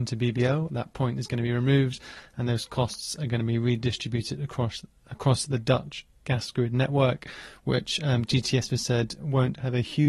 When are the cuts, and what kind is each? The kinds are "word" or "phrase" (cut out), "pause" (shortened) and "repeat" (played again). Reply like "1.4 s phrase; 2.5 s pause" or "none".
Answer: none